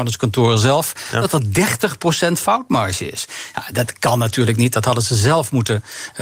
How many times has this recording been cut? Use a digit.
0